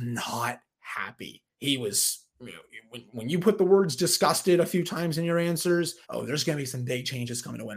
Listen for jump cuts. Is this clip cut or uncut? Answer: cut